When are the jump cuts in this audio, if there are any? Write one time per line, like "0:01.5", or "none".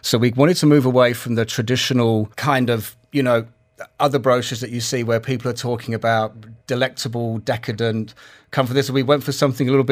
0:02.3
0:06.6